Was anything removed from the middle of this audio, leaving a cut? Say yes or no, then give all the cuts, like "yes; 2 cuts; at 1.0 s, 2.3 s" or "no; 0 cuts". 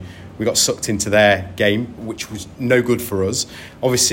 yes; 2 cuts; at 2.0 s, 2.6 s